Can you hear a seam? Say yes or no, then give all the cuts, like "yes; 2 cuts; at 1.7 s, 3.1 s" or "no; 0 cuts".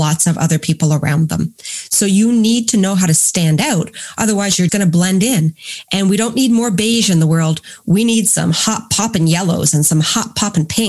yes; 1 cut; at 4.7 s